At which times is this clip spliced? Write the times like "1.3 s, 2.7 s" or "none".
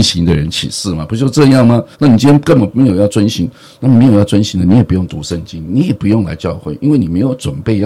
1.9 s